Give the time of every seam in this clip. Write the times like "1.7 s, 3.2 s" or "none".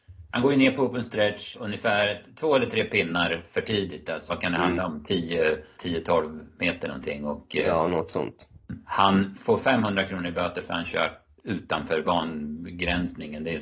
1.5 s, 4.3 s, 5.8 s, 11.4 s